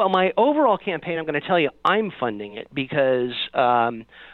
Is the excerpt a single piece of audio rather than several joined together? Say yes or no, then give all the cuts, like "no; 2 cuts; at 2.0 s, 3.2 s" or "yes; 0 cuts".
yes; 0 cuts